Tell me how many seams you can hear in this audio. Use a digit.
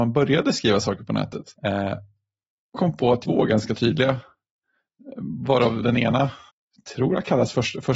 5